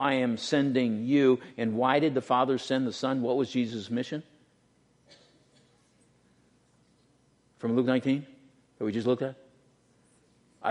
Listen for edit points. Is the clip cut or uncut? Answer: uncut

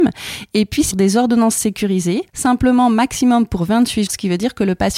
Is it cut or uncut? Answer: cut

